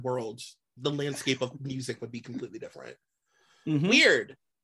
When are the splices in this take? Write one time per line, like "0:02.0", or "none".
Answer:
none